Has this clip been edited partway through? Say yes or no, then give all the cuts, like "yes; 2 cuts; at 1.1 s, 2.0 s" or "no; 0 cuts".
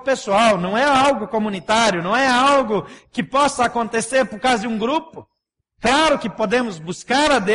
no; 0 cuts